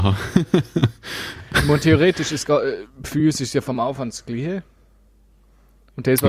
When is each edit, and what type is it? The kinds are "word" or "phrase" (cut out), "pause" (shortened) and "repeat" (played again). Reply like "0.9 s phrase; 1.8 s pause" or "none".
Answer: none